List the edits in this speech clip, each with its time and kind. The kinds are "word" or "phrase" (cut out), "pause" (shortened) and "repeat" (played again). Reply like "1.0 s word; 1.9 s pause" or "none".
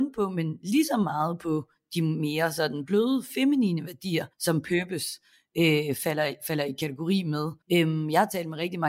4.3 s pause; 7.6 s pause